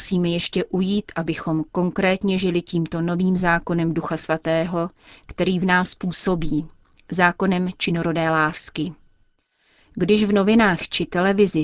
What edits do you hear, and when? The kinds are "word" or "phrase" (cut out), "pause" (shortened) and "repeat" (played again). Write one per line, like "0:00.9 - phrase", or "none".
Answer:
none